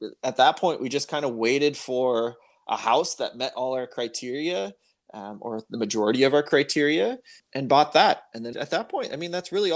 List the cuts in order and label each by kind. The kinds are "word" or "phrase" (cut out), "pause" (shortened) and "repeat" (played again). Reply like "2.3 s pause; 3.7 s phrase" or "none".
8.5 s word